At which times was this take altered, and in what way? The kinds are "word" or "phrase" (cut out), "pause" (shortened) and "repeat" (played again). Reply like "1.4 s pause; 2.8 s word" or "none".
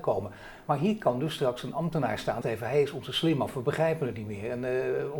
2.4 s phrase

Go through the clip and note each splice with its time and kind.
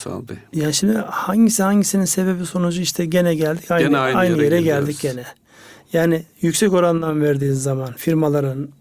none

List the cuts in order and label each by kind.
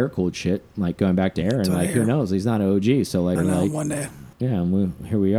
3.4 s word; 4.3 s pause

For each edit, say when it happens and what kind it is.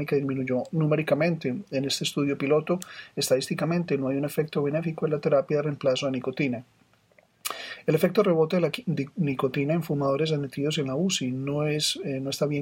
none

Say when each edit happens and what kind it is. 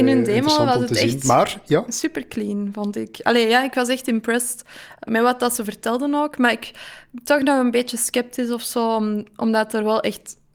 5.1 s word

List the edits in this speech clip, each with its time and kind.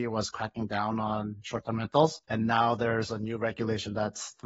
2.2 s pause

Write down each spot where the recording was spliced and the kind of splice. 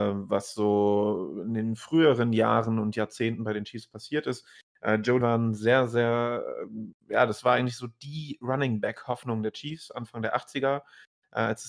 5.2 s word

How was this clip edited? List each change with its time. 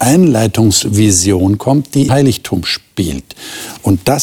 2.1 s word

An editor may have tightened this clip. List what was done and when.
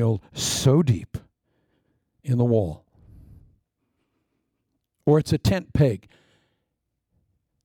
none

